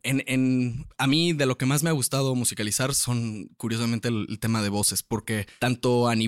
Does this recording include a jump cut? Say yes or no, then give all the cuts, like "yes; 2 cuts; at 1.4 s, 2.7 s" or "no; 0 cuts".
no; 0 cuts